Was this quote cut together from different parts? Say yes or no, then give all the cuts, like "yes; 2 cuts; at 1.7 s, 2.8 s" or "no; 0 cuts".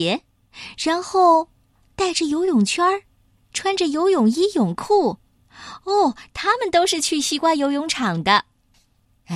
no; 0 cuts